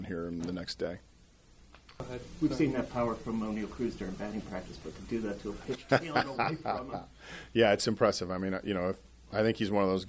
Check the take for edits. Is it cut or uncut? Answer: uncut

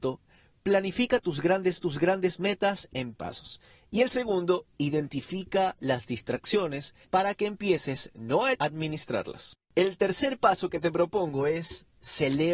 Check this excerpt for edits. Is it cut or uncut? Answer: cut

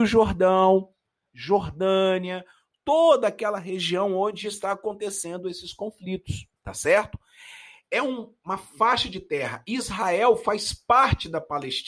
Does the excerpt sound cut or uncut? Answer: cut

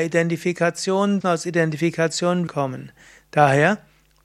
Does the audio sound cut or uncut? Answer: cut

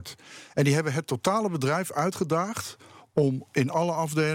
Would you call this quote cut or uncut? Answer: uncut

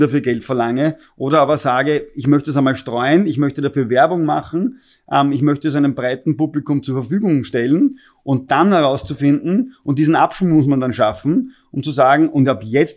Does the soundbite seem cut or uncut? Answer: uncut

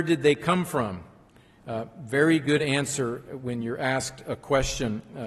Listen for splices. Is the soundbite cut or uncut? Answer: uncut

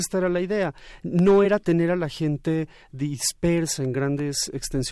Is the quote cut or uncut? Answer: uncut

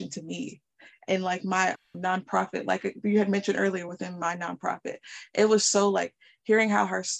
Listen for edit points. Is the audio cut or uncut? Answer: uncut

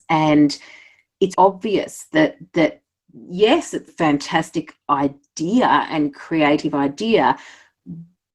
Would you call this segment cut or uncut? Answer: cut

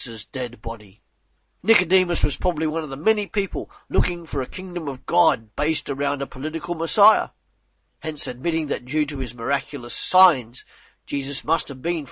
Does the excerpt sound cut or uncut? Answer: uncut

